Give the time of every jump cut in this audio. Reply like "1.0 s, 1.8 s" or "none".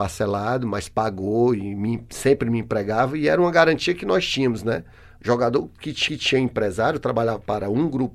6.1 s